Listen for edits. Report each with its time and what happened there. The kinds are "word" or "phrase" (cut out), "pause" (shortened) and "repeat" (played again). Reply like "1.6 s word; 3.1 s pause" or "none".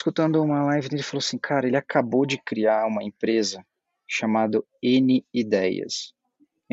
none